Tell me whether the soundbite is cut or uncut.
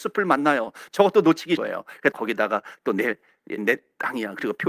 cut